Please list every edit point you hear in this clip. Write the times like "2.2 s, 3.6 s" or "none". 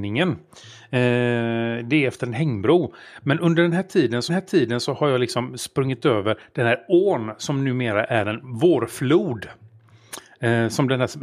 4.3 s